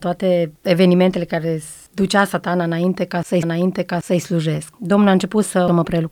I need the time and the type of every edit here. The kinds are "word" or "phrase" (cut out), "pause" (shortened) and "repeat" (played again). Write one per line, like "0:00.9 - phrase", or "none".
0:03.4 - repeat